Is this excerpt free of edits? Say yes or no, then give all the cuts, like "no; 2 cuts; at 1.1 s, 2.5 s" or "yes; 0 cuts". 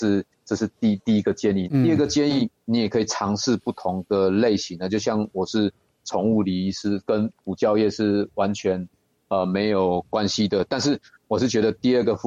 no; 1 cut; at 1.7 s